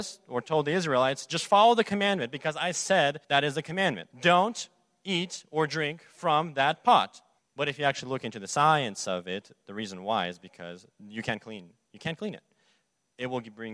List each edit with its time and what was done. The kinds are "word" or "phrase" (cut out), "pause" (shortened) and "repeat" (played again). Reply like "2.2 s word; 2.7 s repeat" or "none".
3.2 s pause; 4.1 s pause; 7.4 s pause